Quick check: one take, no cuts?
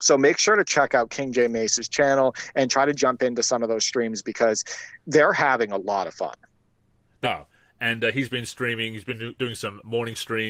no; 2 cuts; at 5.0 s, 7.2 s

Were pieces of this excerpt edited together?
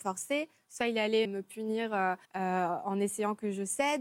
yes; 2 cuts; at 1.2 s, 2.2 s

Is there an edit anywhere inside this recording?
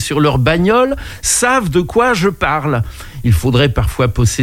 no; 0 cuts

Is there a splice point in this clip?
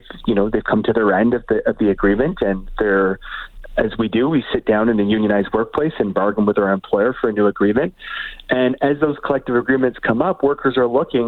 no; 0 cuts

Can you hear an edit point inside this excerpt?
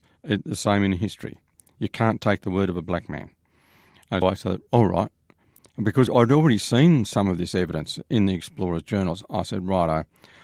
yes; 2 cuts; at 4.2 s, 6.1 s

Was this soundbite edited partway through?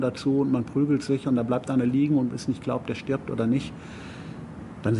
no; 0 cuts

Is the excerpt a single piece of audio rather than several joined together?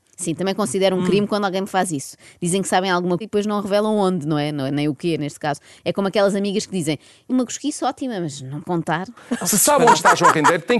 no; 3 cuts; at 3.2 s, 7.3 s, 8.6 s

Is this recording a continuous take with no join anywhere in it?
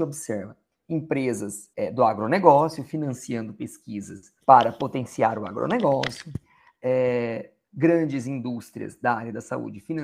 no; 2 cuts; at 1.7 s, 4.4 s

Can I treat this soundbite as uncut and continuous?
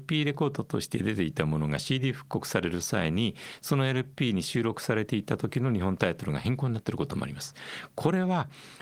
yes; 0 cuts

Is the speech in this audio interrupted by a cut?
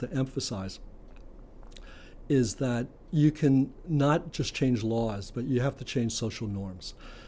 no; 0 cuts

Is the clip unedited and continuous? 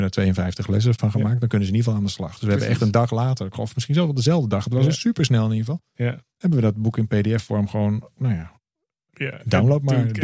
no; 1 cut; at 0.9 s

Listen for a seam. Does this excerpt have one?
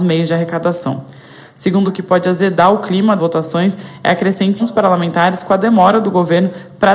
yes; 3 cuts; at 1.8 s, 3.2 s, 4.6 s

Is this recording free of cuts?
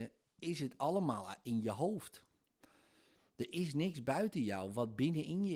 yes; 0 cuts

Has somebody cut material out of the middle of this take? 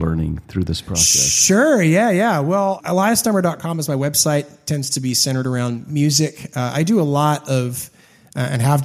yes; 1 cut; at 2.8 s

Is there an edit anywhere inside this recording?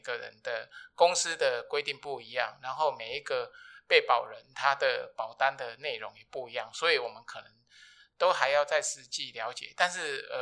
no; 0 cuts

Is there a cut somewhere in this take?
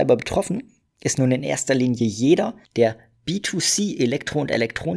yes; 1 cut; at 2.6 s

